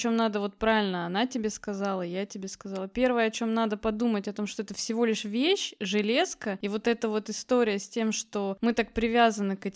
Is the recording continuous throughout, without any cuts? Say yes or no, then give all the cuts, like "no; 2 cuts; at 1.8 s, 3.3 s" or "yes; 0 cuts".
yes; 0 cuts